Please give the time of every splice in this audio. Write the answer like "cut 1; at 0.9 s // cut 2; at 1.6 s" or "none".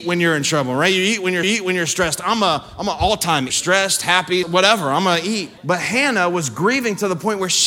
cut 1; at 1.4 s // cut 2; at 3.5 s // cut 3; at 4.4 s // cut 4; at 5.6 s